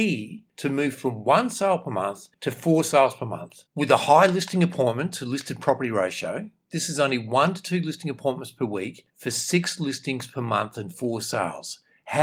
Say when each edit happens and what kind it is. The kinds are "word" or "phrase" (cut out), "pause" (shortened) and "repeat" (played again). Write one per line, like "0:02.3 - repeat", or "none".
0:03.7 - pause
0:09.1 - pause